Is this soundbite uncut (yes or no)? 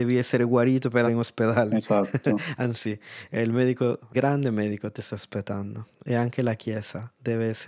no